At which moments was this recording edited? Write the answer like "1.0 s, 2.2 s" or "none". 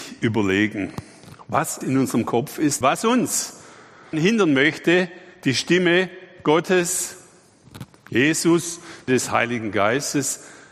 1.8 s, 2.8 s, 4.1 s, 9.1 s